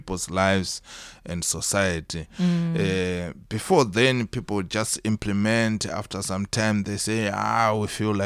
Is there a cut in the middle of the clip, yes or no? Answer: no